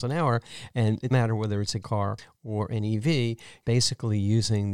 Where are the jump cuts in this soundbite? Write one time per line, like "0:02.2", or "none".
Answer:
0:01.1
0:01.8
0:03.6